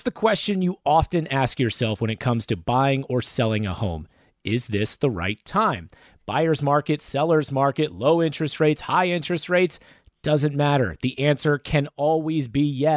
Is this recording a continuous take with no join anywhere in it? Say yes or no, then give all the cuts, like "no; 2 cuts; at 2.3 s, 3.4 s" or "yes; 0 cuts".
yes; 0 cuts